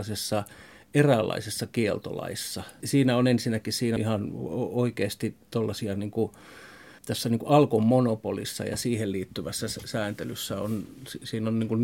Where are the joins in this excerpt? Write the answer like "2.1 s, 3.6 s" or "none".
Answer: 2.8 s, 4.0 s, 5.5 s, 7.0 s